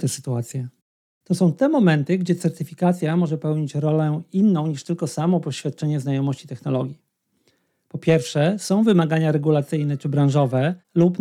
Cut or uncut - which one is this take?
uncut